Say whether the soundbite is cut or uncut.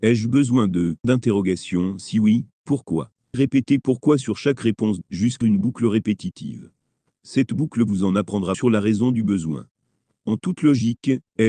cut